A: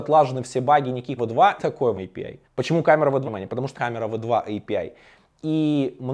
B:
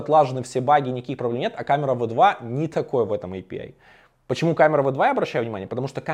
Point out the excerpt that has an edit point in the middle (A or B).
A